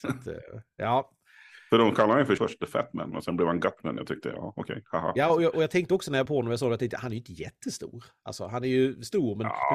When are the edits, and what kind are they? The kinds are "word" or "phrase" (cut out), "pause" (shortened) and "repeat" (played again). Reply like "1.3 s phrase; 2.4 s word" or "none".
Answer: 2.4 s word; 6.3 s word